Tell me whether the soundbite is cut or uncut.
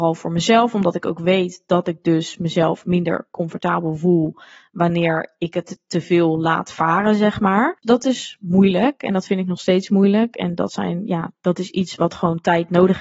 uncut